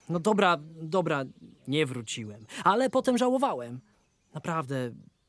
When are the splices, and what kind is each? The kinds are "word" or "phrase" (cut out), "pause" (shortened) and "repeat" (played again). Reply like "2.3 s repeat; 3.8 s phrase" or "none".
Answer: 1.6 s pause; 3.9 s pause